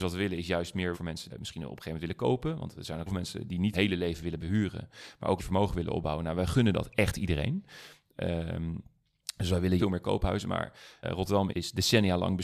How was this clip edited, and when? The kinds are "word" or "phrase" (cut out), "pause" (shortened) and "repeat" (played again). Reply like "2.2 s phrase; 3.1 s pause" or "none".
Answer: 0.9 s word; 1.3 s word; 3.1 s word; 3.7 s word; 4.4 s word; 5.4 s word; 9.8 s word; 11.0 s word; 11.5 s word